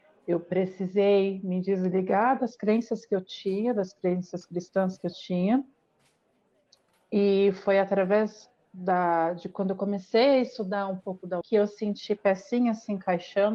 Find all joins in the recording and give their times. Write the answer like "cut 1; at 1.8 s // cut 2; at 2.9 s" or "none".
cut 1; at 11.4 s